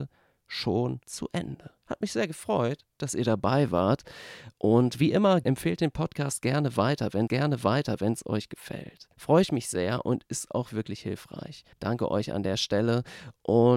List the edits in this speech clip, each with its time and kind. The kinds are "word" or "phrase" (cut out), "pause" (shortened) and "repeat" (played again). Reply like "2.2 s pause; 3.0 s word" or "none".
1.0 s pause; 1.8 s pause; 5.4 s word; 7.3 s repeat; 9.1 s pause; 10.7 s word; 11.7 s pause